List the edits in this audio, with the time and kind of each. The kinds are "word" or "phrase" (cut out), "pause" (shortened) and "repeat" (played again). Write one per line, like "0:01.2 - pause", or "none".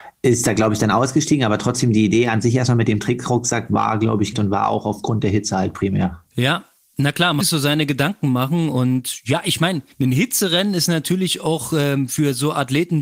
0:04.3 - phrase
0:06.3 - pause
0:07.4 - phrase
0:09.9 - pause